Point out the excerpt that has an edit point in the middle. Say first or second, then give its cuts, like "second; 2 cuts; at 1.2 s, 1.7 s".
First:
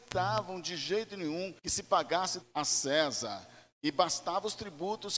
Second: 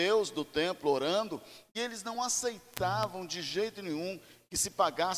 first; 2 cuts; at 1.6 s, 2.4 s